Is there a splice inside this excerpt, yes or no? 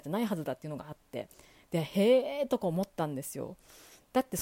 no